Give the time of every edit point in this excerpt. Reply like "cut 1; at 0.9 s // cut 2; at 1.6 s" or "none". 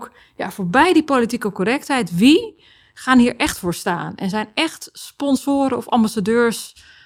none